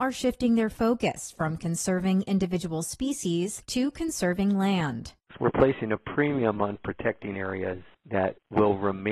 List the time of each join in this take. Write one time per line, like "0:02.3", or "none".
none

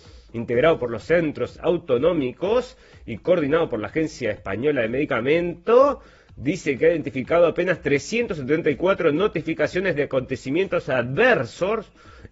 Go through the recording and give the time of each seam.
none

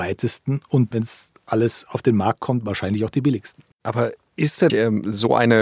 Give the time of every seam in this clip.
0:00.9
0:03.7
0:04.7

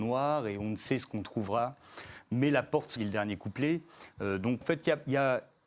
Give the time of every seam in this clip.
0:03.0
0:04.6

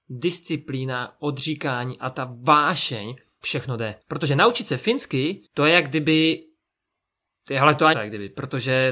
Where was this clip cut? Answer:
0:03.4
0:04.0
0:05.5
0:07.9

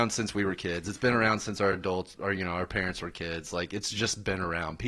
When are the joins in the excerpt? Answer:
none

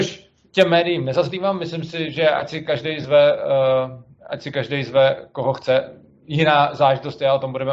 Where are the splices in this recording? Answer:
none

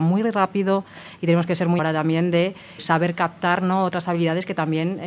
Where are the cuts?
0:01.8
0:02.8

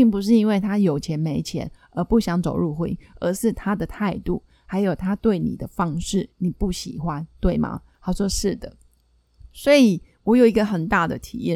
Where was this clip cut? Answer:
0:07.9

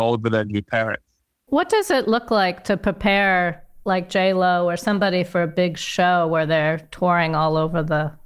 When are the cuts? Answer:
none

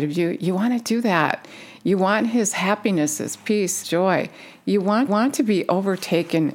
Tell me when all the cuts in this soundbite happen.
0:03.8
0:05.1

